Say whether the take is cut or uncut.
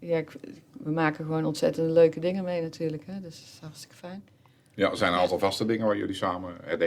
uncut